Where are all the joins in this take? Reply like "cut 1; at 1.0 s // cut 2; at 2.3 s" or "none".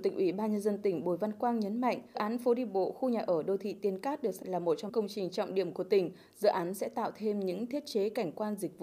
cut 1; at 2.1 s // cut 2; at 4.4 s // cut 3; at 4.9 s